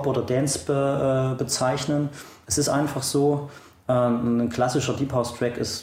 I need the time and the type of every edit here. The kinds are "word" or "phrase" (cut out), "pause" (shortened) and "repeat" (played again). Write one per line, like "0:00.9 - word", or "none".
none

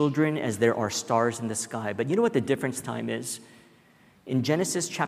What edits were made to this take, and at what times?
0:02.8 - word

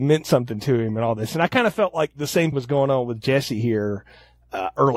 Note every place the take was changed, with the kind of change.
0:02.5 - word

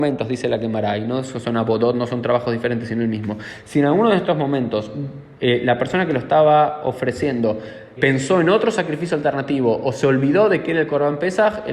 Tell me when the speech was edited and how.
0:08.0 - word

